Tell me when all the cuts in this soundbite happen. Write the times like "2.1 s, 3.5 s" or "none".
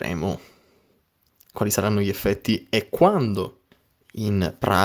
3.7 s